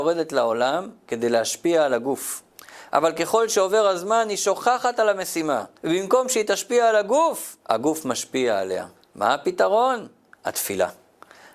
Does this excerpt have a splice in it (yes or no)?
yes